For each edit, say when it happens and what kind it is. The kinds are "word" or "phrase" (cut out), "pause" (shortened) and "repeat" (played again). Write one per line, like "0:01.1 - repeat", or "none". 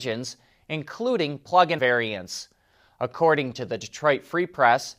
0:01.8 - word